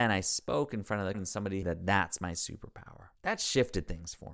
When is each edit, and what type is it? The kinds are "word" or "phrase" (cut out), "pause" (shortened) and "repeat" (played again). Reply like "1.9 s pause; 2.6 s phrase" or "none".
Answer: 1.1 s word; 1.6 s phrase; 3.1 s pause